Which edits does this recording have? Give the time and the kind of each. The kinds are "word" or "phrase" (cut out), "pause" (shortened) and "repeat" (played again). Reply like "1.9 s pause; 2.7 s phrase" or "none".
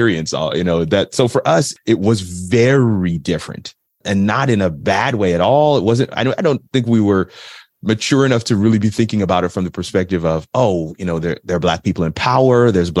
none